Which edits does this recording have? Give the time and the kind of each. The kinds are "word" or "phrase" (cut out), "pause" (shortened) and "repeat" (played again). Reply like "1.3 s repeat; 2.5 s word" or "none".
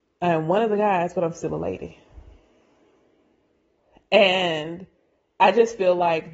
none